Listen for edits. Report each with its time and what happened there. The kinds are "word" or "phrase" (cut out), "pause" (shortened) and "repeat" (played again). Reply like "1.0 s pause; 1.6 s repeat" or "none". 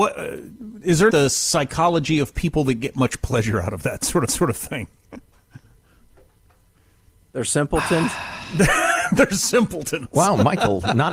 1.1 s phrase; 4.3 s repeat